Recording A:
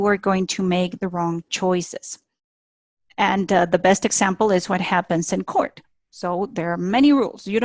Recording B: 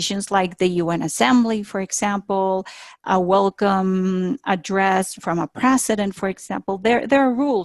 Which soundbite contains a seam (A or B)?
B